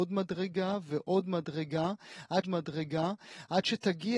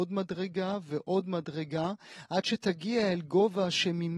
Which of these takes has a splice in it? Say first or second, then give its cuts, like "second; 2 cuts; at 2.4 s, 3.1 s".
first; 1 cut; at 2.4 s